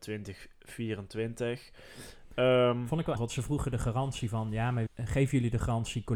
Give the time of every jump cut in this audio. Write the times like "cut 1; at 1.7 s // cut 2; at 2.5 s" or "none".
cut 1; at 3.2 s // cut 2; at 4.9 s